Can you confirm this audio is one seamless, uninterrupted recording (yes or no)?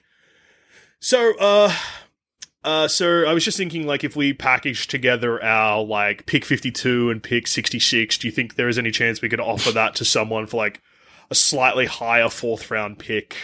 yes